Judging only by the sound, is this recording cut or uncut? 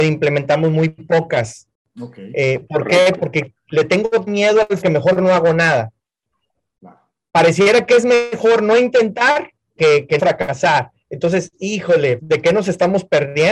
cut